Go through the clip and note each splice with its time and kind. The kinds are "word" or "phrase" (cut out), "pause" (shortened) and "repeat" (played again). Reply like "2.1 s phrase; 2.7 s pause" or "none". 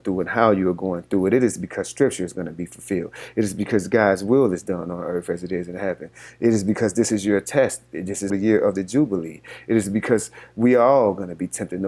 8.3 s word